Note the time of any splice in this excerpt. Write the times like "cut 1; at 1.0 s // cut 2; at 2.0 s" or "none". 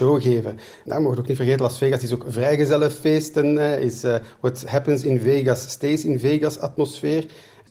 none